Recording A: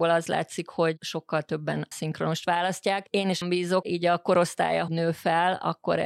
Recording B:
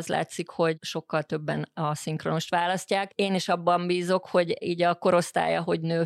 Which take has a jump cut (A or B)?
A